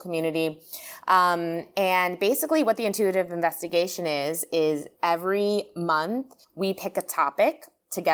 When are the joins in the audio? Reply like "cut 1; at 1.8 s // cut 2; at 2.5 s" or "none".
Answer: cut 1; at 6.4 s